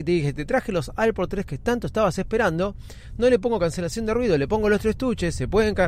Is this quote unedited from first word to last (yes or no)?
yes